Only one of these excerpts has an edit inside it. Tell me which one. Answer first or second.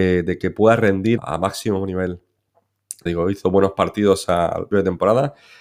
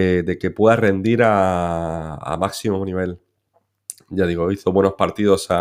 first